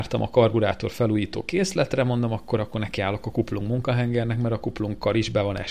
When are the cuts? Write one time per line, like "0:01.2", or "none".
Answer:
none